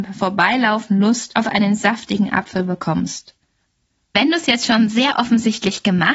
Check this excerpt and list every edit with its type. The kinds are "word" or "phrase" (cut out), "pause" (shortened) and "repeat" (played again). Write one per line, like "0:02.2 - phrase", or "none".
none